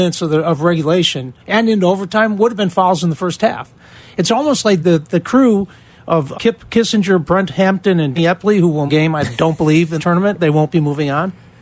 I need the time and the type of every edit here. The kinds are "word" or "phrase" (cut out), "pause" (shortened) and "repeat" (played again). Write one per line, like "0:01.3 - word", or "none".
0:01.4 - pause
0:04.8 - word
0:06.3 - word
0:08.2 - word
0:08.9 - phrase
0:10.0 - word